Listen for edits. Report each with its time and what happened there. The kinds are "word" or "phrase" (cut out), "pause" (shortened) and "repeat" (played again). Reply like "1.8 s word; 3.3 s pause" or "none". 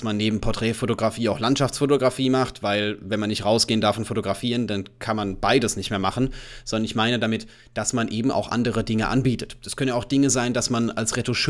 none

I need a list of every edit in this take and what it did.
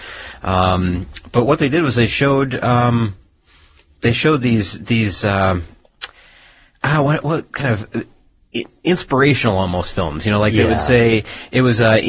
none

